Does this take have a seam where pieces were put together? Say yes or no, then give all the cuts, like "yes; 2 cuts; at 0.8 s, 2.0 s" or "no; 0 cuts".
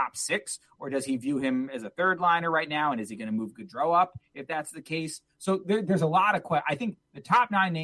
no; 0 cuts